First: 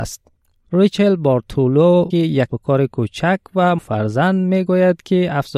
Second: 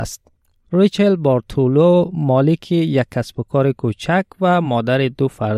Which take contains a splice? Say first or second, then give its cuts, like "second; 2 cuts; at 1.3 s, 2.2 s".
first; 3 cuts; at 2.1 s, 2.5 s, 3.8 s